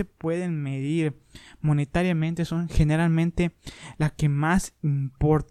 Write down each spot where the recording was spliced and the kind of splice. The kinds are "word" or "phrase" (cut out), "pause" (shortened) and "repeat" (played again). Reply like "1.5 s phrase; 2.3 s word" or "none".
none